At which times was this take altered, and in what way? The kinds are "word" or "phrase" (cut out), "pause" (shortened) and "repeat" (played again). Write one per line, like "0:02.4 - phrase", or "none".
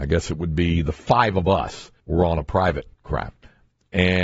0:02.0 - pause
0:02.9 - pause